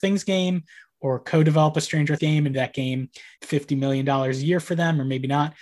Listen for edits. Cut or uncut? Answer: cut